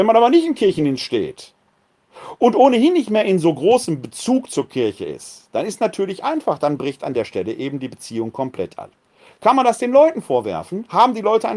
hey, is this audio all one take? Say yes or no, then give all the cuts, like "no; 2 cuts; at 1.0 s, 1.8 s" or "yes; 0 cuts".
yes; 0 cuts